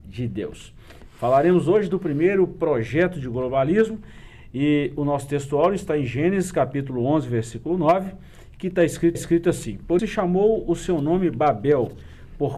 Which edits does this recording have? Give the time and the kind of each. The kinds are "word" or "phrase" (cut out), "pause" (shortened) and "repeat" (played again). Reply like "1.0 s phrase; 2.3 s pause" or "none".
9.1 s repeat; 10.0 s word